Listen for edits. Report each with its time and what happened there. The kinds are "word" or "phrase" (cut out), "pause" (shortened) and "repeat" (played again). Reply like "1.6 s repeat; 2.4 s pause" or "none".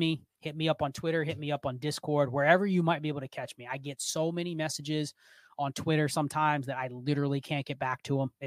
none